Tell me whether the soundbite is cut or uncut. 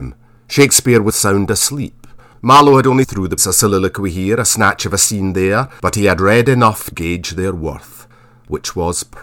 cut